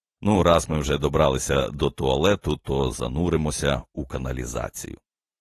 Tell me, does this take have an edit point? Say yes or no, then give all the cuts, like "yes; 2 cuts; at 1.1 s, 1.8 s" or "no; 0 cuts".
no; 0 cuts